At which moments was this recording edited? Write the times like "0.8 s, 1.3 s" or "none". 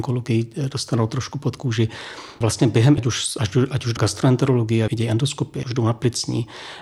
2.4 s, 3.0 s, 4.0 s, 4.9 s, 5.6 s